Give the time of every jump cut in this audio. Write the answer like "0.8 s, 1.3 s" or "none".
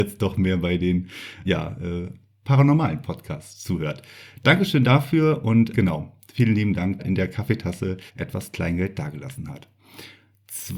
1.4 s, 5.7 s, 7.0 s, 8.1 s